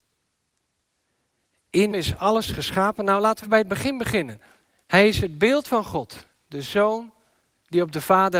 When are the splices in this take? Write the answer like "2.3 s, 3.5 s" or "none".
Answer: 1.9 s, 3.4 s, 4.6 s

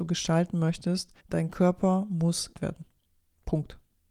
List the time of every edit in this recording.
1.2 s, 2.5 s

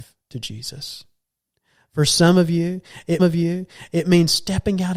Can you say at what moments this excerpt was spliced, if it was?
3.2 s

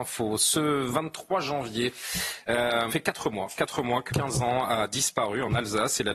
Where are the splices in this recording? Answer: 2.9 s, 4.1 s

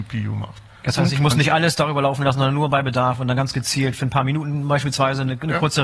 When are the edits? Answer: none

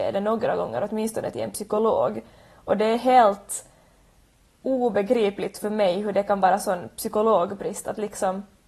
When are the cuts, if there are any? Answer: none

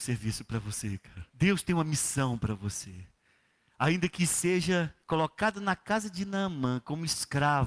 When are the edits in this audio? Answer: 1.3 s, 5.0 s

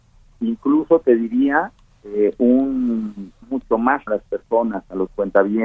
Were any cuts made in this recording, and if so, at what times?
3.4 s, 4.1 s

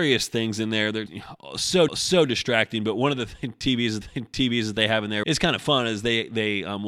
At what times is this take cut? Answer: 1.1 s, 1.9 s, 4.0 s, 5.2 s

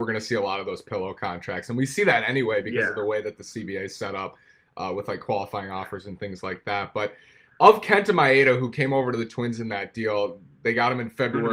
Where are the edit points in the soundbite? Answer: none

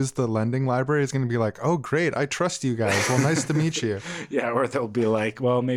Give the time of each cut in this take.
none

